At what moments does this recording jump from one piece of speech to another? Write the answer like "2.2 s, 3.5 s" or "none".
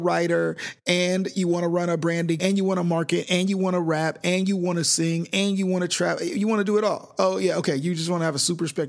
2.4 s